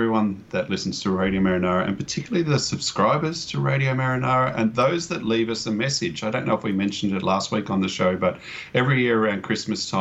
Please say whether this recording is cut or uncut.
uncut